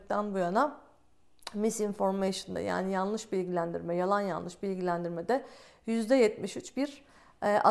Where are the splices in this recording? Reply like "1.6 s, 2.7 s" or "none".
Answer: none